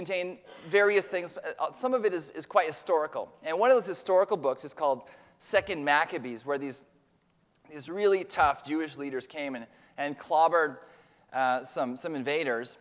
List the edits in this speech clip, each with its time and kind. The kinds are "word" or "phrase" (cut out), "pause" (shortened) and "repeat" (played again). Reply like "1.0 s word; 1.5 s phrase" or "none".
none